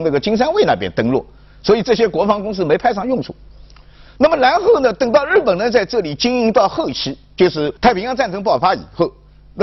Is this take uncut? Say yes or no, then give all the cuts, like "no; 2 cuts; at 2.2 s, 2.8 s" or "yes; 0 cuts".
no; 1 cut; at 7.8 s